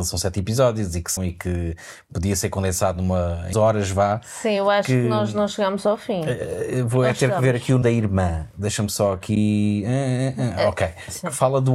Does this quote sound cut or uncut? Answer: cut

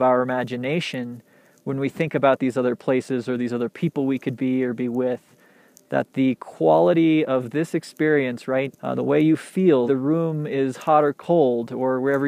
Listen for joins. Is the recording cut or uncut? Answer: cut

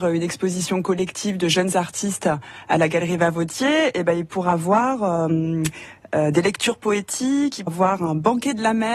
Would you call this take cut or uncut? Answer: cut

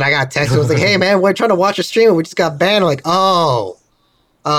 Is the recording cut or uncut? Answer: uncut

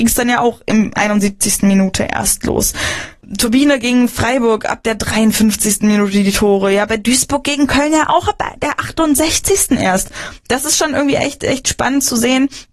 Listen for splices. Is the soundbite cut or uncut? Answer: cut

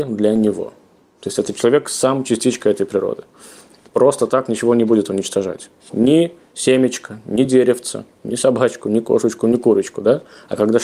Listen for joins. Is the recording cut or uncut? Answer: uncut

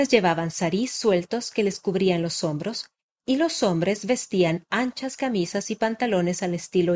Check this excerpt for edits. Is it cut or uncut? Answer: uncut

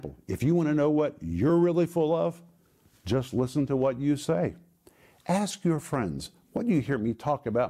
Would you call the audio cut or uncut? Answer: uncut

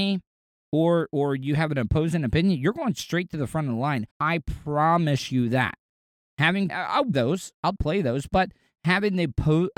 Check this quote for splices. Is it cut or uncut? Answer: cut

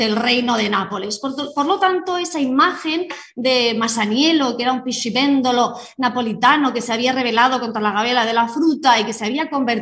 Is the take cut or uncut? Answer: uncut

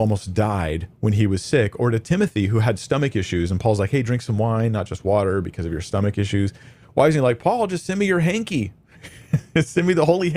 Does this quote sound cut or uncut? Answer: uncut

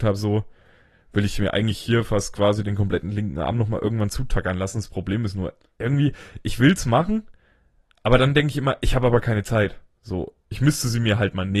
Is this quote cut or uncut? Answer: uncut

